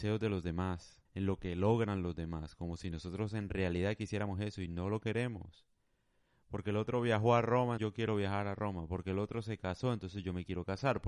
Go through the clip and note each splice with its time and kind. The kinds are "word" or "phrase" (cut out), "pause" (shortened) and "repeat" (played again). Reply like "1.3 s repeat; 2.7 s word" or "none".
1.1 s pause; 7.8 s word